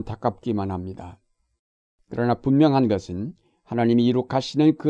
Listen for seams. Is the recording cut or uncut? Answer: uncut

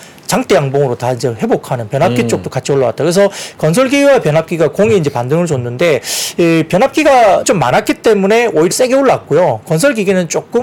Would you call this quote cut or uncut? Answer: cut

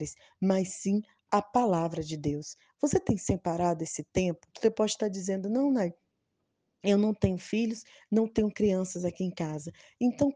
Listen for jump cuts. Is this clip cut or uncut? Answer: cut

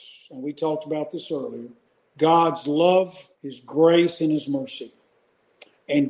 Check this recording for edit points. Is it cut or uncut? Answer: cut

